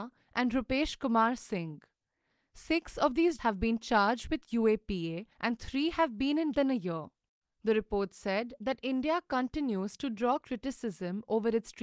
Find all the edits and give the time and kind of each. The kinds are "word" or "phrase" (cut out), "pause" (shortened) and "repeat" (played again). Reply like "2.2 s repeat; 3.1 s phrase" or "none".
3.4 s word; 5.3 s pause; 6.5 s phrase; 7.3 s pause